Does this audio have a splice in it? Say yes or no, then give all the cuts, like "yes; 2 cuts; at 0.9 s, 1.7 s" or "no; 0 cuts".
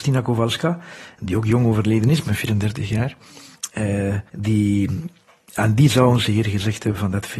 yes; 1 cut; at 4.3 s